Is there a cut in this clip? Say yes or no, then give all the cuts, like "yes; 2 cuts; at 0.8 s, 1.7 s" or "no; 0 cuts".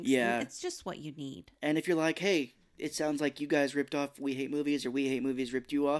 no; 0 cuts